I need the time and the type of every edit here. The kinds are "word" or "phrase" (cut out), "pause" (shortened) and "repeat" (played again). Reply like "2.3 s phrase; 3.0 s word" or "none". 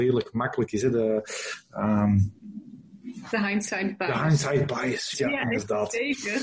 5.1 s word